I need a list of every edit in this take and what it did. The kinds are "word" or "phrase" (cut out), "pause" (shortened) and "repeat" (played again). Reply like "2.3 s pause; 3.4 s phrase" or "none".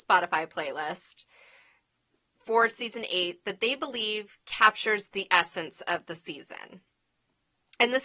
none